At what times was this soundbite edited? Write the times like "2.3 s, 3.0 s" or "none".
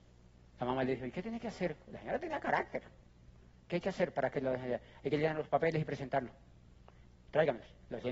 none